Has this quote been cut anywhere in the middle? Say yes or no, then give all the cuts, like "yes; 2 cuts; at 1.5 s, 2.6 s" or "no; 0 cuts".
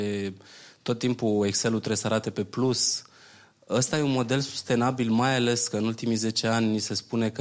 no; 0 cuts